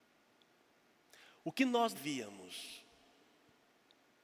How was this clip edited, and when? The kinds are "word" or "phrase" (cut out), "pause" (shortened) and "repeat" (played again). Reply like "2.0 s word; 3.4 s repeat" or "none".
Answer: 1.9 s word